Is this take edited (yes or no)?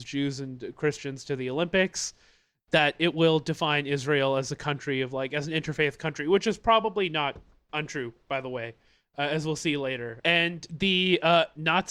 no